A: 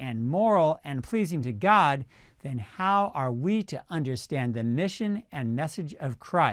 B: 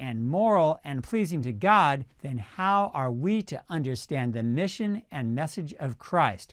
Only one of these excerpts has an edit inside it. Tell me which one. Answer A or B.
B